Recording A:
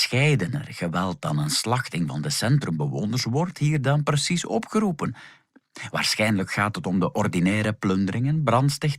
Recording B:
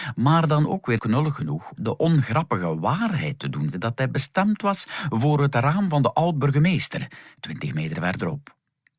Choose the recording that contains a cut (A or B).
B